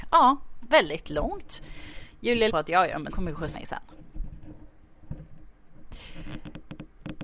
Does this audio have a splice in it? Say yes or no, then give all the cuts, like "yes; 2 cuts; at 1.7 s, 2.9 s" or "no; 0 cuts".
yes; 3 cuts; at 2.5 s, 3.1 s, 3.5 s